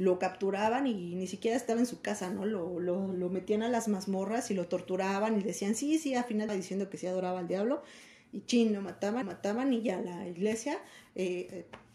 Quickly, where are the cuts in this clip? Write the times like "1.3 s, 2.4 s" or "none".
6.5 s, 9.2 s

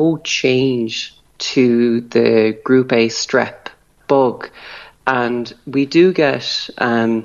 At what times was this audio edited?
4.0 s

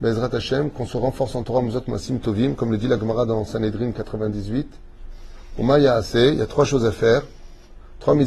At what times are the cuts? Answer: none

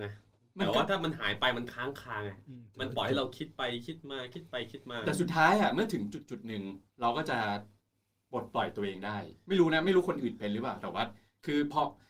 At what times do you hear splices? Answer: 6.9 s

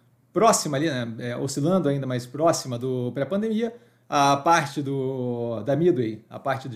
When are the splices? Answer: none

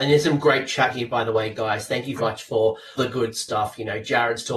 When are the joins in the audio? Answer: 2.2 s, 3.0 s

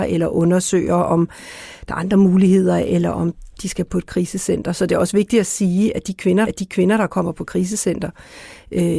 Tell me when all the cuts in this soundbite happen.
6.5 s

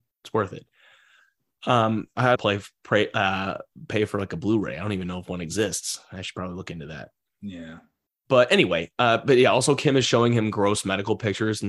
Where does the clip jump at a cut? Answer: 2.4 s

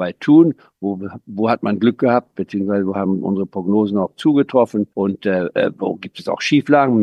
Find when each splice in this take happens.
4.9 s

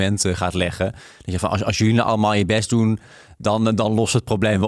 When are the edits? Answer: none

